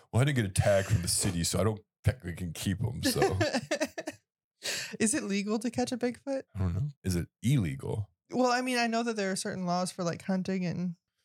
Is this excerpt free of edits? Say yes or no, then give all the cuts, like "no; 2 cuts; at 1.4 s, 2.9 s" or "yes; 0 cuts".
no; 2 cuts; at 6.5 s, 6.9 s